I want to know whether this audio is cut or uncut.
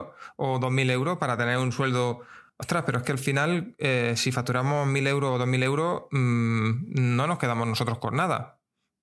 cut